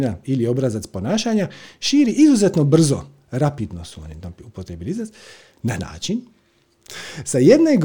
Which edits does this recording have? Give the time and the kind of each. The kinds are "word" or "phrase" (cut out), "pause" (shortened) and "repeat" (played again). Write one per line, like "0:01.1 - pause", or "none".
0:05.8 - word